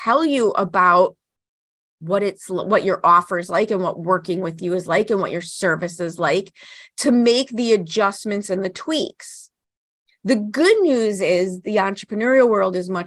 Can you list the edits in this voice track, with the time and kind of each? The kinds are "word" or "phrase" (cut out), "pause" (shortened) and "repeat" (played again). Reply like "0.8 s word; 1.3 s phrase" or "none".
none